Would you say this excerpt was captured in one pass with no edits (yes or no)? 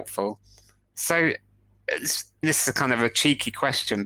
no